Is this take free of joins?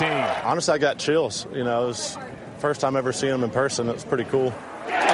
yes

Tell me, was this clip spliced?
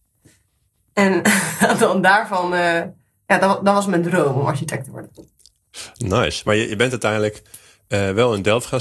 no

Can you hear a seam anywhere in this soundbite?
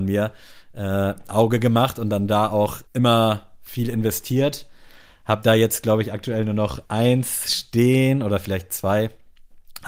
yes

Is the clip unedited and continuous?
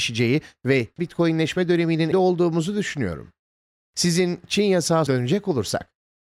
no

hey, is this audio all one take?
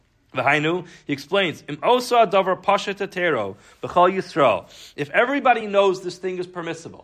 yes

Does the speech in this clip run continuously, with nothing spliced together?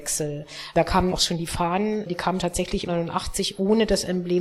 no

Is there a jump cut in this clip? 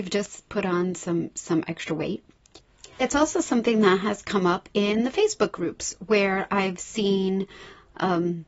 yes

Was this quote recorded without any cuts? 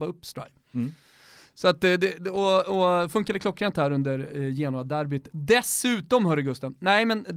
yes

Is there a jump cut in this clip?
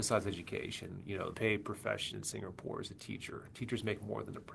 yes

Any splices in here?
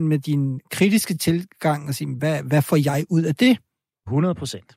no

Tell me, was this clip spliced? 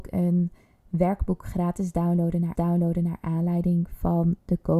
yes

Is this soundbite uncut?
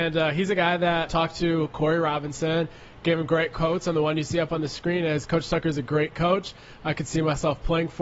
no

